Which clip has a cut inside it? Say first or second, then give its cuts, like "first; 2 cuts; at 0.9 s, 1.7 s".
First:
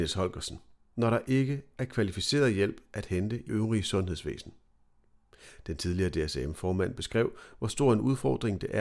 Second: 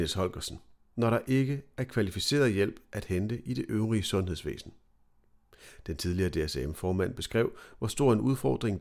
first; 1 cut; at 3.5 s